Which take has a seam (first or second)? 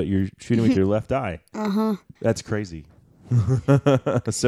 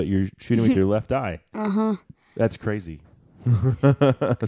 first